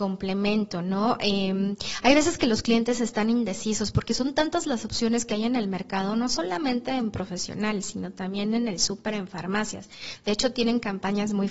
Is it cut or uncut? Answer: uncut